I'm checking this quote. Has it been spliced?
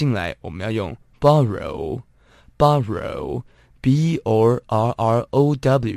no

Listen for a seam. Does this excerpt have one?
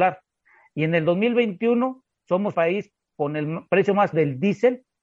yes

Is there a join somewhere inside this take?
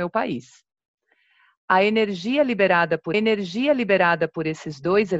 yes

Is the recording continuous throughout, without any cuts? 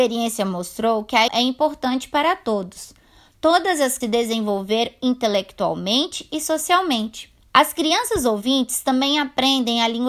no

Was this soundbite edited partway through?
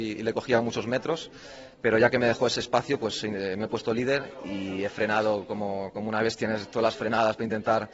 yes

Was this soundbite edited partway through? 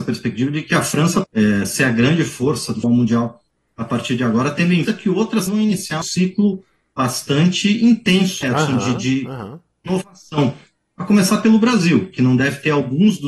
yes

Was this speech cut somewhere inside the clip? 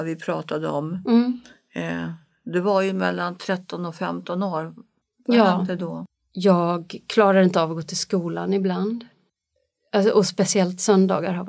no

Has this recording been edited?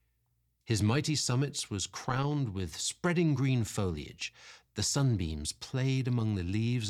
no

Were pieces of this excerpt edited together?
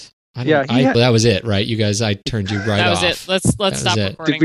yes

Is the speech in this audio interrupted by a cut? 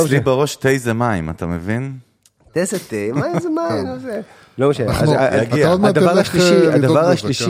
no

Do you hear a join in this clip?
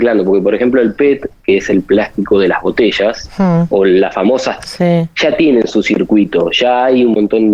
yes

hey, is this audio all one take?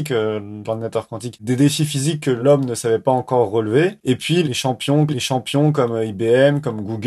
no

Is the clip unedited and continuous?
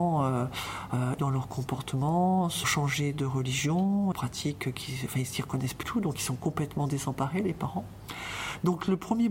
no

